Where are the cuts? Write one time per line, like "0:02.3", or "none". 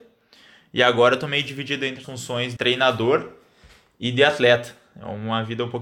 0:02.0
0:02.6